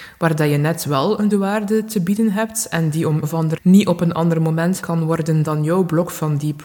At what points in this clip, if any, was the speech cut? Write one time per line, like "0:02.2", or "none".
0:01.3
0:03.2
0:03.6
0:04.8